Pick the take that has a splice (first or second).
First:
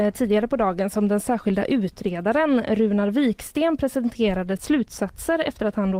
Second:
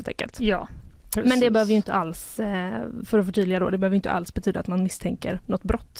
first